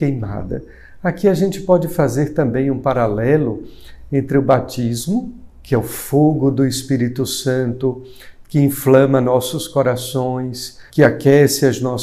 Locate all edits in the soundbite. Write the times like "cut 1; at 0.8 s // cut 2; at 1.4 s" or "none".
cut 1; at 10.9 s

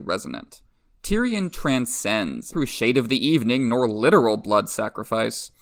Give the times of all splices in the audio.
cut 1; at 2.5 s

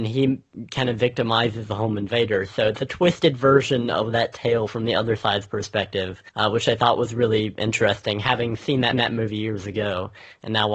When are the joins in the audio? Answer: cut 1; at 6.3 s // cut 2; at 8.9 s

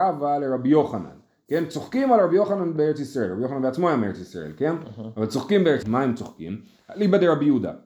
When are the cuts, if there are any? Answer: cut 1; at 5.8 s

